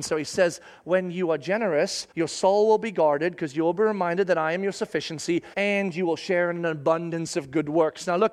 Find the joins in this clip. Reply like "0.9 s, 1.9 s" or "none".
2.1 s, 5.5 s